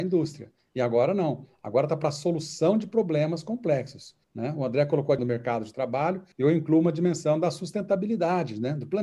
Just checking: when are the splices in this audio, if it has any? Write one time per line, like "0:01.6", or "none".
0:04.2
0:05.2
0:06.3